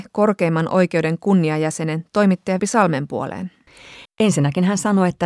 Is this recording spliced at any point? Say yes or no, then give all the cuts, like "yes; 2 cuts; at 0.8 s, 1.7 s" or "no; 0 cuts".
yes; 1 cut; at 2.6 s